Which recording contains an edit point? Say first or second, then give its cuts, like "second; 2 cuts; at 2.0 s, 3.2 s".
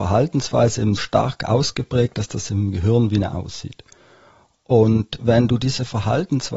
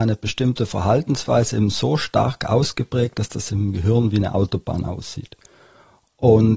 first; 2 cuts; at 1.0 s, 3.3 s